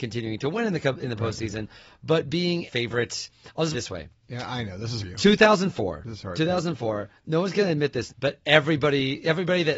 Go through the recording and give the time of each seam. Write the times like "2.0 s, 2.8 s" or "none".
2.7 s, 3.7 s, 5.0 s, 8.1 s